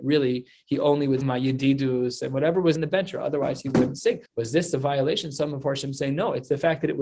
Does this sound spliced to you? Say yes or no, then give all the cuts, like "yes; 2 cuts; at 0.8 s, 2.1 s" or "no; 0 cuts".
yes; 3 cuts; at 1.2 s, 2.7 s, 4.3 s